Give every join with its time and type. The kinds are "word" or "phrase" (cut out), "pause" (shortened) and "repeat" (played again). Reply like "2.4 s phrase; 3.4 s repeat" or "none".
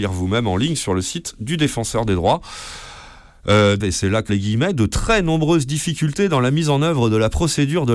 3.8 s phrase; 4.3 s word